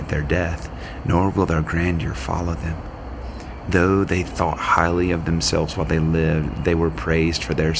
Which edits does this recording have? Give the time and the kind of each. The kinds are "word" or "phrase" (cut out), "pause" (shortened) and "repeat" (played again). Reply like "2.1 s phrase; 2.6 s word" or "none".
none